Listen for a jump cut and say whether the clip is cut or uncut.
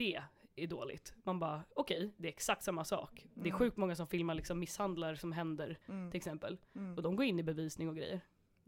cut